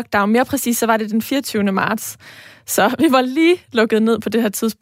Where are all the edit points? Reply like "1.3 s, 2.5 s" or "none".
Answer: none

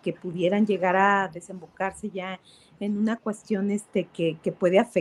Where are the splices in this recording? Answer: none

